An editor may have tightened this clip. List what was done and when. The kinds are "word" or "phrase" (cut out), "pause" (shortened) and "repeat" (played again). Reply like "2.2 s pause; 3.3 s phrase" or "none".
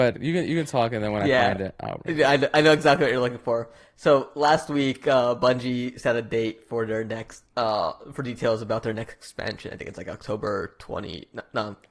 7.5 s pause